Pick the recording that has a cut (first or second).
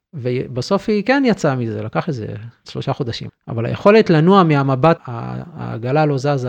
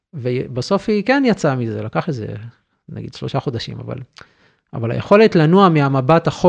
first